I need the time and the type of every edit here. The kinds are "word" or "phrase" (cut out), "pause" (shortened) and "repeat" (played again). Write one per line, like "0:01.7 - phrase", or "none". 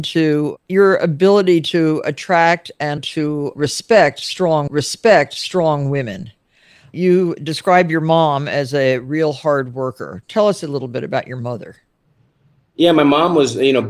0:03.0 - word
0:04.7 - repeat